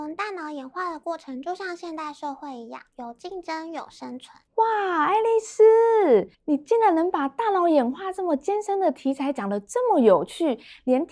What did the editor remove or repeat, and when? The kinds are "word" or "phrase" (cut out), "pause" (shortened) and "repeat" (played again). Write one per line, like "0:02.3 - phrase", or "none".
0:04.5 - pause
0:06.3 - pause